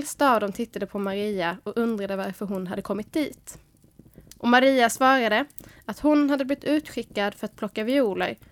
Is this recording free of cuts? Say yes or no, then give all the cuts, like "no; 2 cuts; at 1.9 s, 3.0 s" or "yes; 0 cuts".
yes; 0 cuts